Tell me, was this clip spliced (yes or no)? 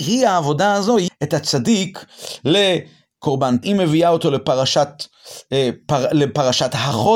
yes